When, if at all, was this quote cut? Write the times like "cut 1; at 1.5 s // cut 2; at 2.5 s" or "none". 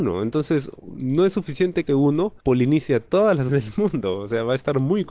cut 1; at 1.9 s // cut 2; at 2.4 s // cut 3; at 3.5 s